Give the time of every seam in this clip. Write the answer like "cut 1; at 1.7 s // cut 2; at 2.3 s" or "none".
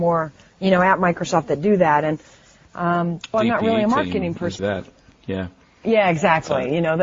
cut 1; at 3.3 s // cut 2; at 4.6 s